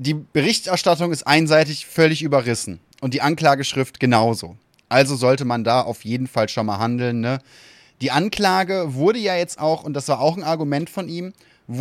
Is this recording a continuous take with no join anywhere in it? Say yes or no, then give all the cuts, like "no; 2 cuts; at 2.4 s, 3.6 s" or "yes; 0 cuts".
yes; 0 cuts